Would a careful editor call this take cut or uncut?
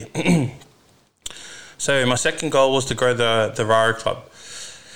uncut